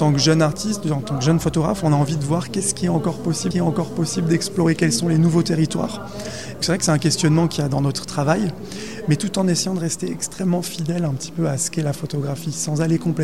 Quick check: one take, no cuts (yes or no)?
no